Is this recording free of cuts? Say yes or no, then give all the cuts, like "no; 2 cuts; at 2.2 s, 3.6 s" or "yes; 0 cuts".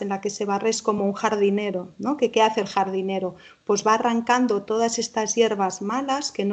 yes; 0 cuts